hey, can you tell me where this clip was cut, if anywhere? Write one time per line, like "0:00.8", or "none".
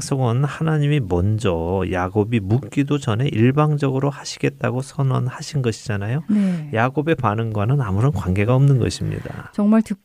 none